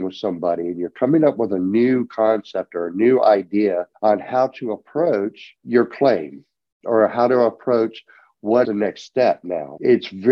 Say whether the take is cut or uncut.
cut